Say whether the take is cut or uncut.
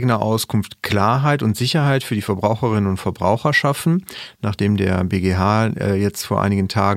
uncut